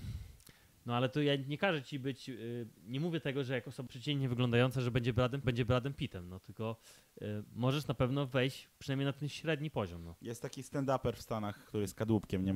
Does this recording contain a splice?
yes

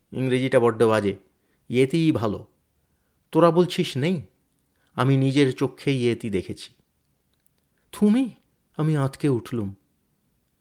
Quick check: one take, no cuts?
yes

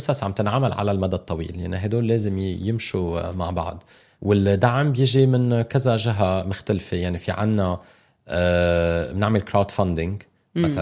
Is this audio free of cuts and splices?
yes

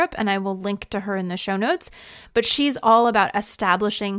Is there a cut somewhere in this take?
no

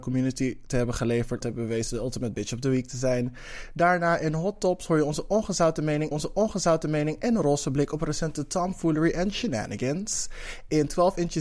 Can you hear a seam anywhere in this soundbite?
yes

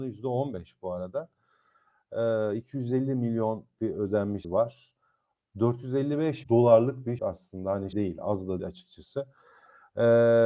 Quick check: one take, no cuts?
no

